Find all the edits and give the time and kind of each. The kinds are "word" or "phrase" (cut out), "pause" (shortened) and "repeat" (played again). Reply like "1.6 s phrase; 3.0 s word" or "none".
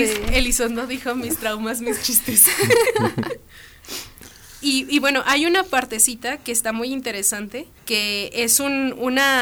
7.8 s pause